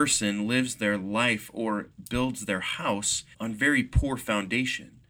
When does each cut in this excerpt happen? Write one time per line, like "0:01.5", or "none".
0:03.3